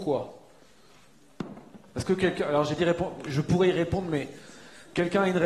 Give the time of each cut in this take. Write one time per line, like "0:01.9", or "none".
0:02.8